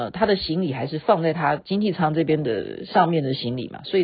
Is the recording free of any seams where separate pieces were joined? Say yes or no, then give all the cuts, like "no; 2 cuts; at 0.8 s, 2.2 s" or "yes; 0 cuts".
yes; 0 cuts